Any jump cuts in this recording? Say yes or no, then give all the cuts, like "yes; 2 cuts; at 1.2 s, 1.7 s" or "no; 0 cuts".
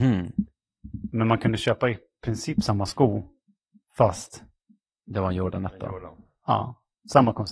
no; 0 cuts